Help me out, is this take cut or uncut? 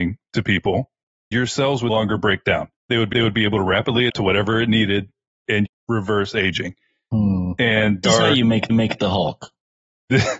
cut